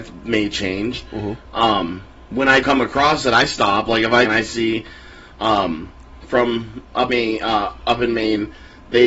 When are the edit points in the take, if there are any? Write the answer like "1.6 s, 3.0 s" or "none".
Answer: 2.6 s, 4.2 s, 6.2 s, 7.1 s